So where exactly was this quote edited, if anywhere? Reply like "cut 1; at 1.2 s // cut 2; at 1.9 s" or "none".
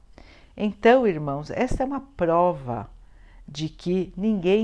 none